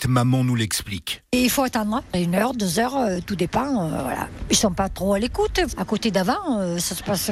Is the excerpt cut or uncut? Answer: uncut